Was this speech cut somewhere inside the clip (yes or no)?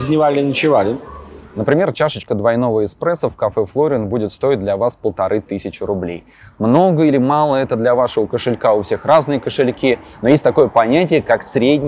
no